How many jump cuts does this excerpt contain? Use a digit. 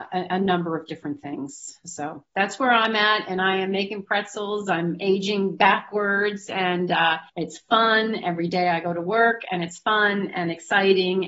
2